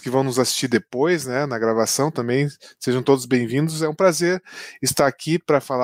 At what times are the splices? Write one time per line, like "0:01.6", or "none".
none